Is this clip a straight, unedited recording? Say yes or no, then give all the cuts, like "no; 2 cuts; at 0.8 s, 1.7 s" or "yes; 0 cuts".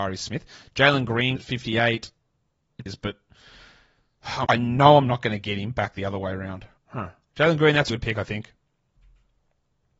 no; 5 cuts; at 1.4 s, 2.9 s, 4.4 s, 6.8 s, 7.9 s